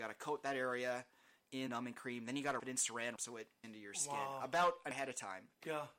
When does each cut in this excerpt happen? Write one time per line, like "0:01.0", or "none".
0:01.7
0:02.6
0:03.2
0:03.6
0:04.9

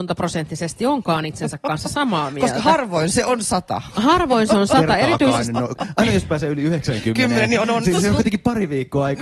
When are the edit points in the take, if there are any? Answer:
0:07.8

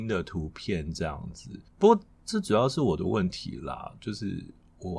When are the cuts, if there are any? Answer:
0:01.7

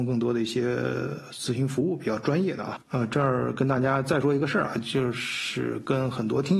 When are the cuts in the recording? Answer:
0:02.8

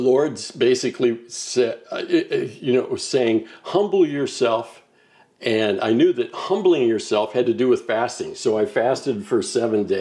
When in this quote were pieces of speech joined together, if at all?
none

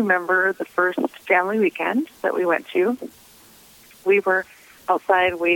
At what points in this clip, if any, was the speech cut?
none

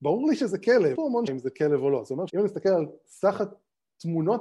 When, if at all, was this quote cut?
0:01.0
0:01.3
0:02.3

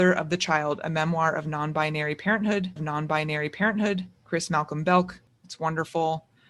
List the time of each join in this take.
0:02.8

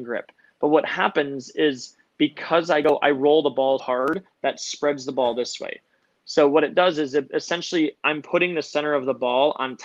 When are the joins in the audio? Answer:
0:03.8

